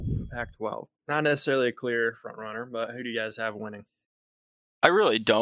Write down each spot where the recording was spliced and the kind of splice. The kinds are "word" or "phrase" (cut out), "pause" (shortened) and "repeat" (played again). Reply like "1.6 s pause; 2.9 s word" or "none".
1.0 s pause